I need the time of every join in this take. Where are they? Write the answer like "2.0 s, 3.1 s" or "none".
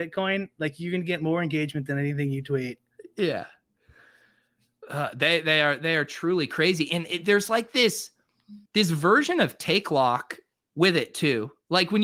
8.7 s